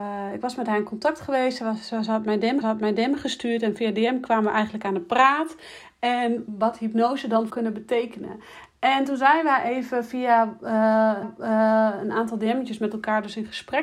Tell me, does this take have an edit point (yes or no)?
yes